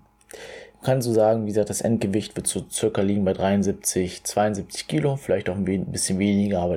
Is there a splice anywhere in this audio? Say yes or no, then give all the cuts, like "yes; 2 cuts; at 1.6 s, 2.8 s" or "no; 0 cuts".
no; 0 cuts